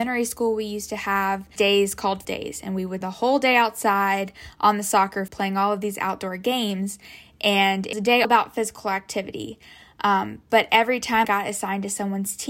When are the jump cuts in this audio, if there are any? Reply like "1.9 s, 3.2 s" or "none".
1.6 s, 2.2 s, 3.0 s, 5.3 s, 7.9 s, 8.2 s, 11.2 s